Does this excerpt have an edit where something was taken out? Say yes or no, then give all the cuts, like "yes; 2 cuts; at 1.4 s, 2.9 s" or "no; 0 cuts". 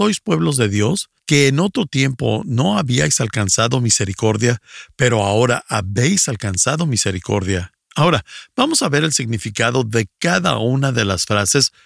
yes; 2 cuts; at 1.2 s, 7.8 s